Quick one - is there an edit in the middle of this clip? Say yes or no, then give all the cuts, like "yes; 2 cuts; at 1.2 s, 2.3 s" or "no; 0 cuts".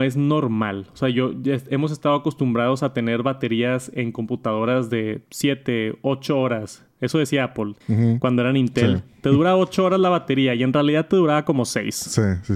yes; 1 cut; at 7.8 s